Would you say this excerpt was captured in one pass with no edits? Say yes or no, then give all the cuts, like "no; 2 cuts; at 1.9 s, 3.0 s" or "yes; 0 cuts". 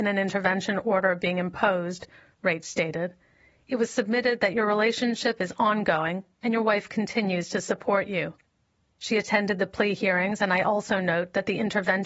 yes; 0 cuts